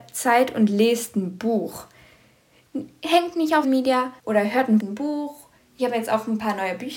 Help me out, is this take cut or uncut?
cut